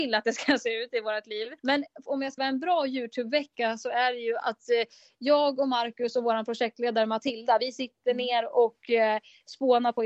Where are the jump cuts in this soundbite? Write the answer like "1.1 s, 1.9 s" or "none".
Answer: 1.6 s, 2.4 s, 4.4 s